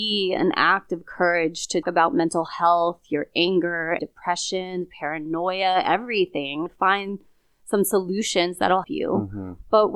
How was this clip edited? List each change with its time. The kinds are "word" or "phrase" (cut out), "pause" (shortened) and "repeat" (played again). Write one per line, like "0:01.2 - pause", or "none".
0:01.8 - word
0:04.0 - word
0:06.7 - word
0:08.8 - word